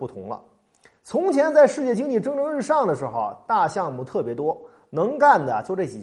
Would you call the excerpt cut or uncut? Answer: uncut